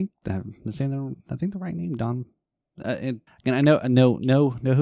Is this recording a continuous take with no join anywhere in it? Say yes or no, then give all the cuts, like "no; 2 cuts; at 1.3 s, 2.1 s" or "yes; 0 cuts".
no; 1 cut; at 3.3 s